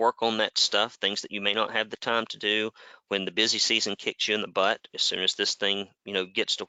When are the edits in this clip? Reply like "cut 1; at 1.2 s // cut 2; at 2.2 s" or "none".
none